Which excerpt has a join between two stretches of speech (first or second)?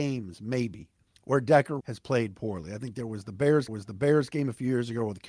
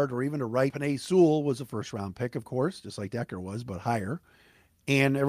first